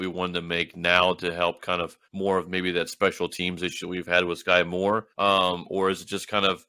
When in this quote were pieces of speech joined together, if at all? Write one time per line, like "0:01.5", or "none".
0:02.0
0:05.1